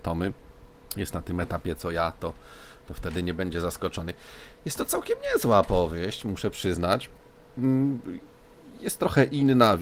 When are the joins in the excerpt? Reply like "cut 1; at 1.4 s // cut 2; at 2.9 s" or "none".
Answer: none

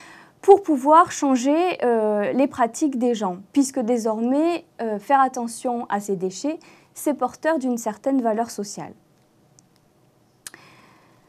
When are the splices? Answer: cut 1; at 3.5 s

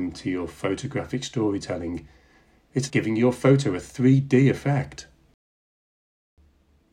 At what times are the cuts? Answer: cut 1; at 2.9 s

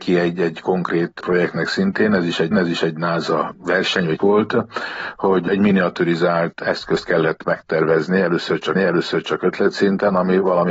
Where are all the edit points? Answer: cut 1; at 2.5 s // cut 2; at 4.2 s // cut 3; at 8.8 s

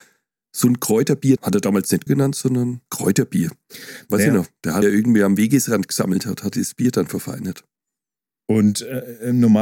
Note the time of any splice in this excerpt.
cut 1; at 1.4 s // cut 2; at 2.1 s // cut 3; at 2.9 s // cut 4; at 4.8 s // cut 5; at 6.5 s

